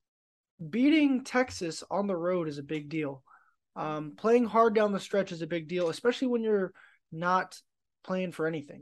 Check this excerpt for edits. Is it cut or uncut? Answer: uncut